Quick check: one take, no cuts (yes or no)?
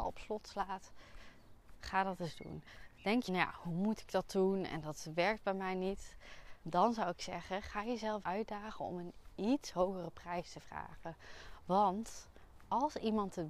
no